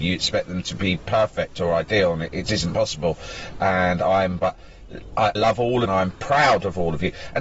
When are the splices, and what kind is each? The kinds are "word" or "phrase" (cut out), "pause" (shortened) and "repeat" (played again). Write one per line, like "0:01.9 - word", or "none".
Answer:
0:02.5 - word
0:04.4 - word
0:05.4 - word
0:05.9 - phrase